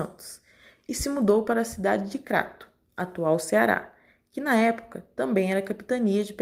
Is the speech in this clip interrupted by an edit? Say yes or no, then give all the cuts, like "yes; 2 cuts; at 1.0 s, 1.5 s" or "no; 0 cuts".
no; 0 cuts